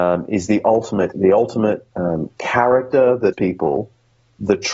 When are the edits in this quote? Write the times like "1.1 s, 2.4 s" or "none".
1.1 s, 1.9 s, 3.3 s

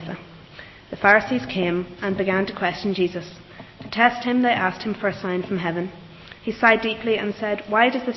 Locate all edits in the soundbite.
6.4 s

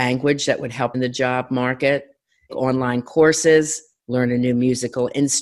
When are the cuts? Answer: 0.9 s, 2.5 s

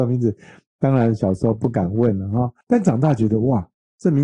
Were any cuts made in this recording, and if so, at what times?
2.6 s

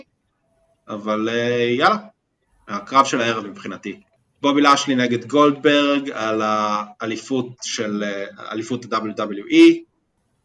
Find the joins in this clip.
none

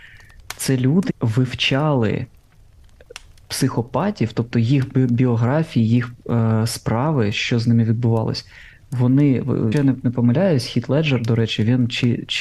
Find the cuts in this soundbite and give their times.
1.1 s, 9.7 s

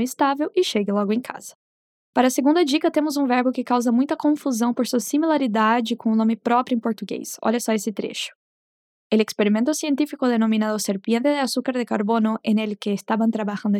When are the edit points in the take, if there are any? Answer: none

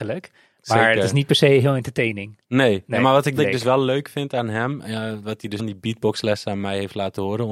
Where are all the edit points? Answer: 3.4 s, 5.6 s

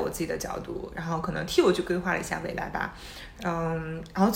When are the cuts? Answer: none

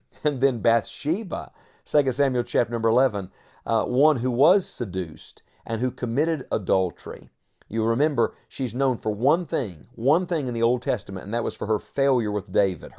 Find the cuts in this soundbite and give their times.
none

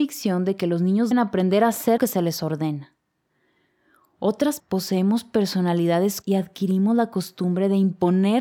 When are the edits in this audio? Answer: 1.1 s, 2.0 s, 4.6 s, 6.2 s

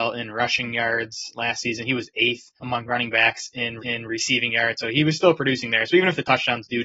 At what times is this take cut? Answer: 2.6 s, 3.8 s

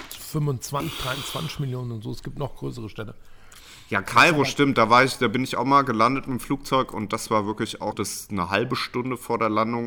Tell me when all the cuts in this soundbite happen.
7.9 s

